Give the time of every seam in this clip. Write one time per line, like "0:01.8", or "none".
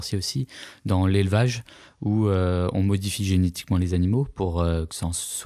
none